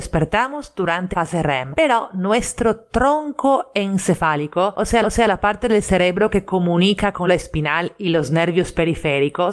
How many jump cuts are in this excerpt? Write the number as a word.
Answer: three